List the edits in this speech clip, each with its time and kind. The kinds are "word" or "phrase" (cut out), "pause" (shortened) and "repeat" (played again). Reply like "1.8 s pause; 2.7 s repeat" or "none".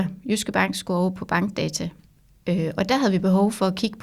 none